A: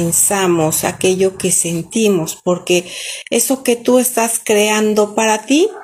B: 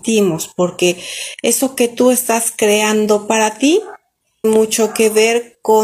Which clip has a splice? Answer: B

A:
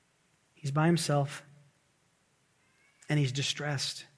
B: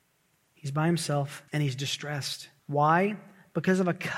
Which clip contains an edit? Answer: B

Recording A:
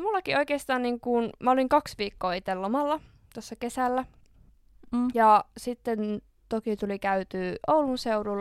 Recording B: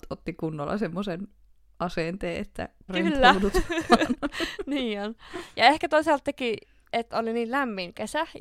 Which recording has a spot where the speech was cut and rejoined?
B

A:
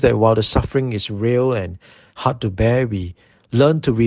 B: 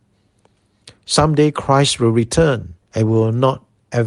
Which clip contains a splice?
B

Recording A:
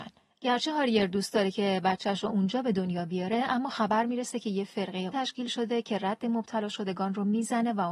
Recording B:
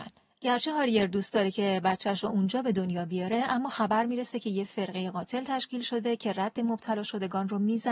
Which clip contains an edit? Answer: A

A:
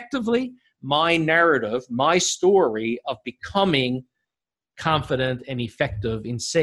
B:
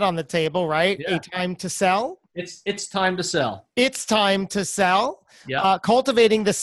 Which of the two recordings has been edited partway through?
B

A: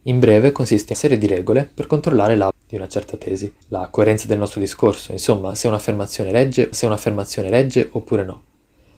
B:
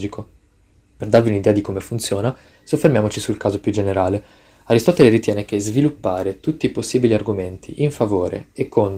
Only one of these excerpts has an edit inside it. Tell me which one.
A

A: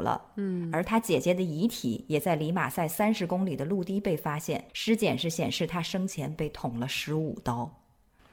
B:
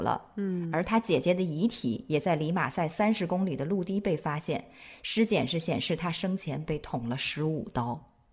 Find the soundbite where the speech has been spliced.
A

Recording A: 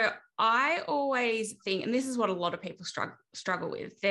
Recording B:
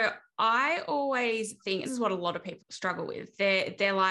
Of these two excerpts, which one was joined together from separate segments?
B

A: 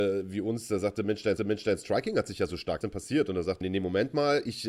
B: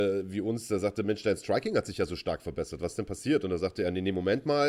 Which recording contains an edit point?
A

